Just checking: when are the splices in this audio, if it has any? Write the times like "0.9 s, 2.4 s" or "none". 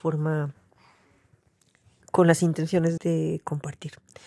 3.0 s